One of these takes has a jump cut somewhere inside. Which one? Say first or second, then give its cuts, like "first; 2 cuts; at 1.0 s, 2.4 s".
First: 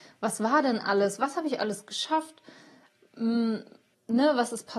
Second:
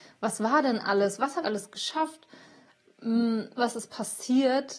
second; 2 cuts; at 1.4 s, 3.6 s